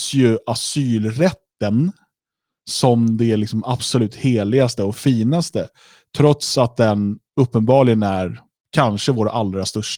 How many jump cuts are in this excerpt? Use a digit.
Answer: 0